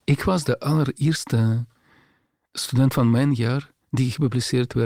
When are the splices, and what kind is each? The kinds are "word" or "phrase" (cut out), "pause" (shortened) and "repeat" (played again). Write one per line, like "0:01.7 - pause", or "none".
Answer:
none